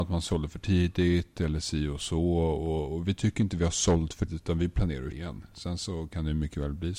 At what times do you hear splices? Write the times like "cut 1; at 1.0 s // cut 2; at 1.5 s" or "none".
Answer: cut 1; at 4.3 s // cut 2; at 5.1 s